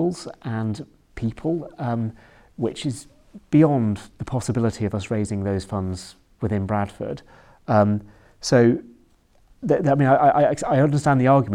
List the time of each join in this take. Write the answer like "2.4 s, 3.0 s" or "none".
none